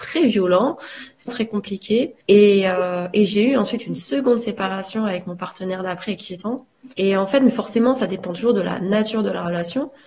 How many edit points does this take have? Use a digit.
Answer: 4